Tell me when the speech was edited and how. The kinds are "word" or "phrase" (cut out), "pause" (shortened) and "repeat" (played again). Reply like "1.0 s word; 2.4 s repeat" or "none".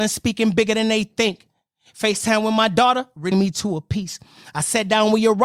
3.3 s word